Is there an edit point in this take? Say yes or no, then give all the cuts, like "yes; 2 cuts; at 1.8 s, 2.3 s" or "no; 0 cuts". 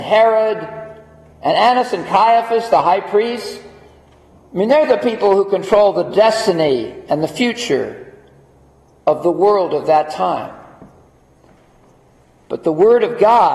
no; 0 cuts